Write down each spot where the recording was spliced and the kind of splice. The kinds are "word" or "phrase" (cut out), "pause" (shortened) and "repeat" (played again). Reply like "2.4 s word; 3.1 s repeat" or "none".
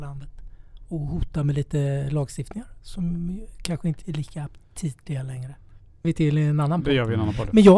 4.0 s phrase; 6.0 s phrase